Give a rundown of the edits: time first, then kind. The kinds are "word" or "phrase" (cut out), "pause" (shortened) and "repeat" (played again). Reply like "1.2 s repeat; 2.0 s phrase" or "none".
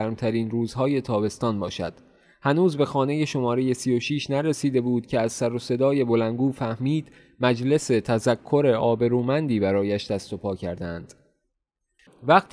none